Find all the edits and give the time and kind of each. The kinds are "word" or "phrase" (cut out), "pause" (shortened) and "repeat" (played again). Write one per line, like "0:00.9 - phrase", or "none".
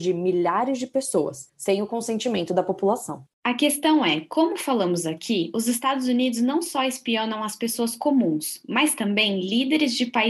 none